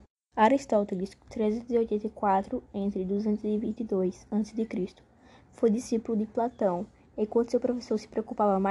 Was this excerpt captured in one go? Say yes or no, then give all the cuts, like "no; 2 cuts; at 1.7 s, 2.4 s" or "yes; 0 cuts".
yes; 0 cuts